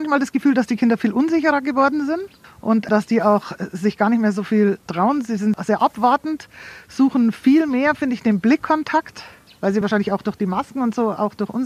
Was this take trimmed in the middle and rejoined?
no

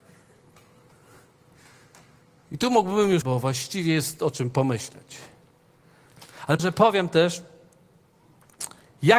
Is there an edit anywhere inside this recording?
yes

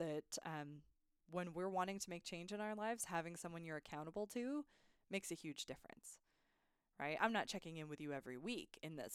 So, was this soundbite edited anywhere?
no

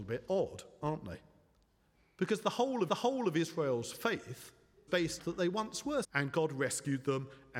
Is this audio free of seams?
no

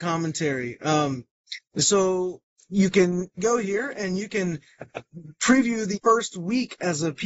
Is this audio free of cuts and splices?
no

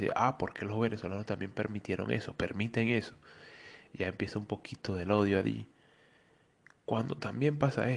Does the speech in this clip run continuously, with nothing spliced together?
yes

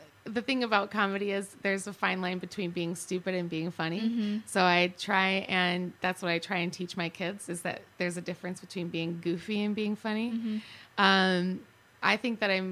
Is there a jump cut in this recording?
no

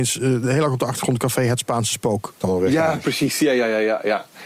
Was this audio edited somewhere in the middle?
yes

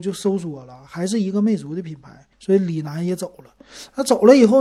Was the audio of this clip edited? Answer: yes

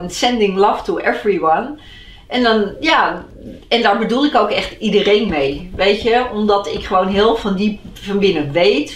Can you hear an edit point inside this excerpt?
no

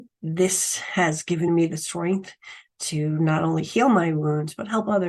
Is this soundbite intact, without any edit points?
yes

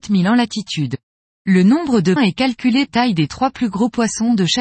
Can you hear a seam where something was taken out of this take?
yes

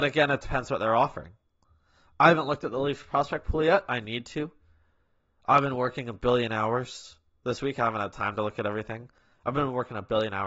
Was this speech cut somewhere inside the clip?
no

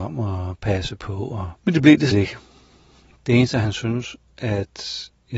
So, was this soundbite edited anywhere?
yes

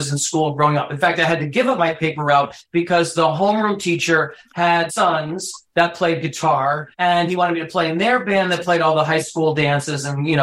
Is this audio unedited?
no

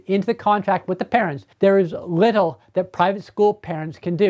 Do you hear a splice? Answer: yes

